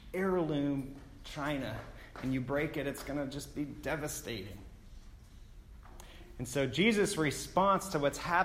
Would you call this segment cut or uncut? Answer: uncut